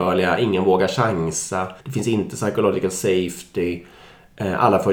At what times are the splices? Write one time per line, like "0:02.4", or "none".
0:01.8